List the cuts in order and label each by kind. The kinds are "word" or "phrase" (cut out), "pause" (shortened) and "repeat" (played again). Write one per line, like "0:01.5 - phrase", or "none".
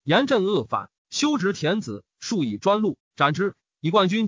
0:01.0 - pause